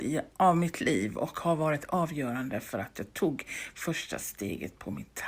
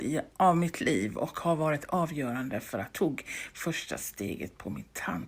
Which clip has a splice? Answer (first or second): second